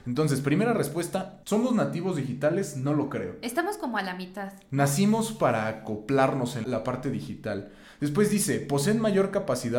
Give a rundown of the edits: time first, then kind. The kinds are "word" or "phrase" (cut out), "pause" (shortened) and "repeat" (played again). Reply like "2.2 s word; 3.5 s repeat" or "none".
6.6 s word